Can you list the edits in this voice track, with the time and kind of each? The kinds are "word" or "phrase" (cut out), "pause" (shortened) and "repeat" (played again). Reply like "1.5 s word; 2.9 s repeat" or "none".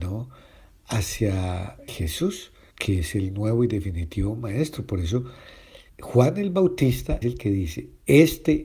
1.9 s word; 2.7 s pause; 5.9 s pause; 7.2 s word